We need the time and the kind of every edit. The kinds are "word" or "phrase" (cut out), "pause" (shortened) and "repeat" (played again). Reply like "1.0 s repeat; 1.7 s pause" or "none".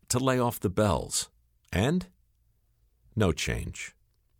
none